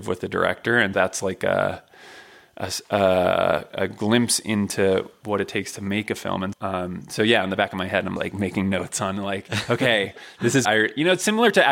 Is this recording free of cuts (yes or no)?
no